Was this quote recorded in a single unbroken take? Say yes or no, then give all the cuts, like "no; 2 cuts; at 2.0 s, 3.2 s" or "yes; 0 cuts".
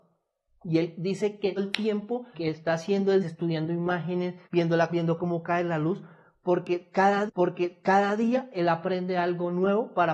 no; 6 cuts; at 1.6 s, 2.3 s, 3.2 s, 4.4 s, 4.9 s, 7.3 s